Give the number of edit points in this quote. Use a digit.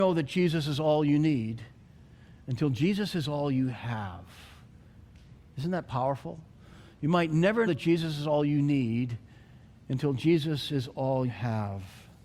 2